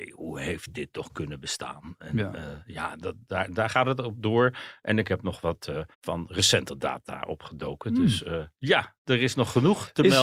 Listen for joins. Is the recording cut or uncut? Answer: cut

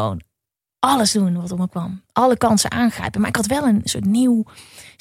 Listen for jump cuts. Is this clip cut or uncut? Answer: cut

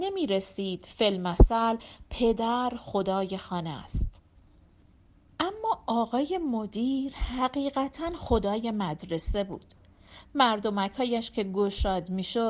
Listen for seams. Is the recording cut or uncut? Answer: uncut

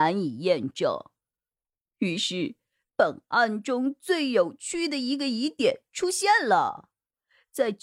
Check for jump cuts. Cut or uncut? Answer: uncut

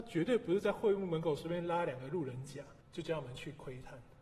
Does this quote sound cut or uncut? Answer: cut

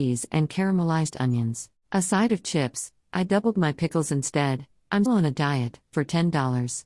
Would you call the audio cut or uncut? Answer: cut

